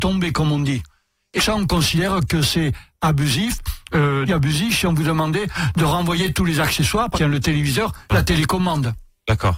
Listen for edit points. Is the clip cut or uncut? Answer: cut